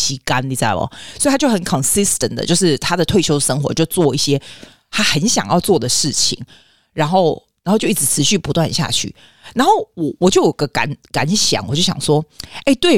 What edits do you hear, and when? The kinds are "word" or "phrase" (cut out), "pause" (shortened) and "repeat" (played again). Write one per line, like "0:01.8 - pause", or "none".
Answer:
none